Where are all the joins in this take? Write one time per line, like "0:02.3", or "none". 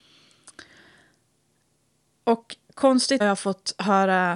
0:03.2